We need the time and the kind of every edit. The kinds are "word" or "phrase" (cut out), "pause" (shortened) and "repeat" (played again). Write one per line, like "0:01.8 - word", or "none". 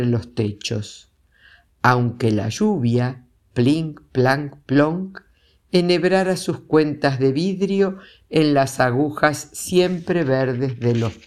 none